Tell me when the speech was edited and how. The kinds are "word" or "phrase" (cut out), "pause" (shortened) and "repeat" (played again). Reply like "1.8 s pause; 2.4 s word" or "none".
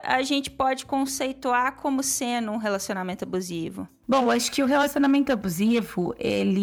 none